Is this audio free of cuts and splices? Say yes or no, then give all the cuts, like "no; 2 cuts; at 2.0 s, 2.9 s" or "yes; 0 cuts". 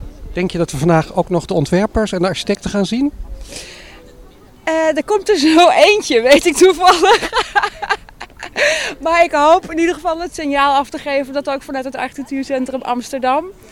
yes; 0 cuts